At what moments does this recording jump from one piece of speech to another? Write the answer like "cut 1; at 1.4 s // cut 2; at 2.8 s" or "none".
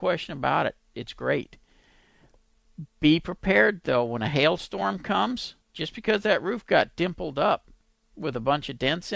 cut 1; at 5.6 s